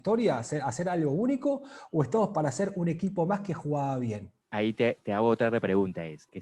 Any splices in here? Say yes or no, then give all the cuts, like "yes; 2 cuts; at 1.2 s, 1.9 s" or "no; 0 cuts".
no; 0 cuts